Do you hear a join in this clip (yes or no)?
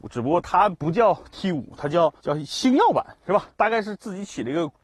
yes